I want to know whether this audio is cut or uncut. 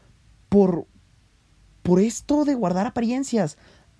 uncut